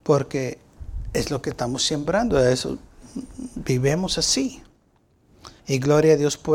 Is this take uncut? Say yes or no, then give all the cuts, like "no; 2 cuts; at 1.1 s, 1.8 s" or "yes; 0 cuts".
no; 1 cut; at 5.6 s